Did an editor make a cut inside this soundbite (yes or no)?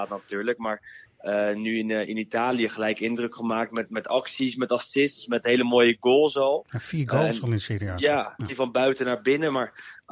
yes